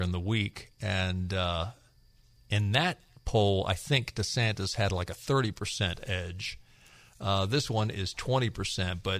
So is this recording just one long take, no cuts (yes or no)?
yes